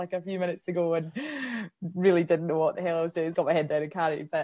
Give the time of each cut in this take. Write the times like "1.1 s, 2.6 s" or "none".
3.3 s